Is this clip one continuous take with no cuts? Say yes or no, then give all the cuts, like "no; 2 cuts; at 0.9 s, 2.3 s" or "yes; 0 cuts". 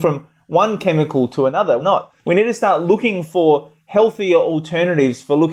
no; 2 cuts; at 1.8 s, 2.2 s